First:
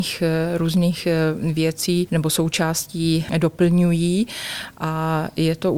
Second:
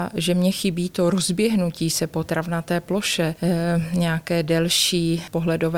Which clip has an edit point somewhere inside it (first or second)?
second